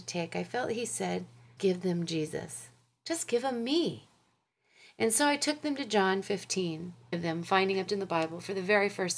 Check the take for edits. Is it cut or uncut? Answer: cut